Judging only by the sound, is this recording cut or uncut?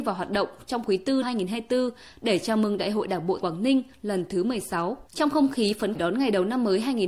cut